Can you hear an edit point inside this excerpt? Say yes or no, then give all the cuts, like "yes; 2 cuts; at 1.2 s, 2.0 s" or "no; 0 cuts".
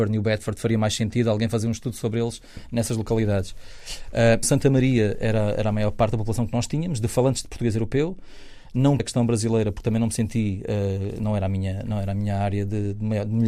yes; 2 cuts; at 4.4 s, 9.0 s